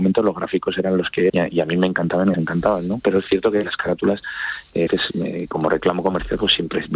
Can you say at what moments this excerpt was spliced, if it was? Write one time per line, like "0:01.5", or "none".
0:01.3
0:02.3
0:04.9